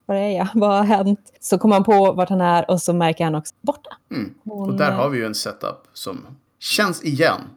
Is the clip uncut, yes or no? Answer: no